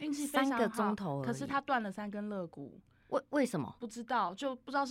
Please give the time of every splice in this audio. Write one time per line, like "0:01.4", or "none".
none